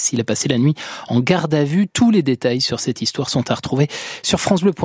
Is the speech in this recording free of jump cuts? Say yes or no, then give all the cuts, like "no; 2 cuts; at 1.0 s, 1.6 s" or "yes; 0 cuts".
yes; 0 cuts